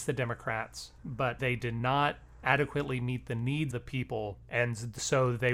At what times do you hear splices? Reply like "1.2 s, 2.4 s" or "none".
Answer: 1.4 s, 3.7 s